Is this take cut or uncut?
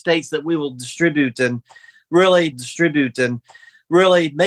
cut